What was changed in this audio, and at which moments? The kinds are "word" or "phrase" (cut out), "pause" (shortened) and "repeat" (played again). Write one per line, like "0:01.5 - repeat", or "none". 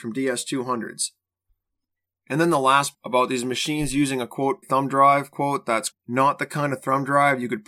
0:02.9 - word
0:04.6 - word
0:05.3 - word
0:05.9 - word